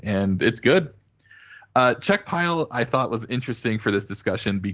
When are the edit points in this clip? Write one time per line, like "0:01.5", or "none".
none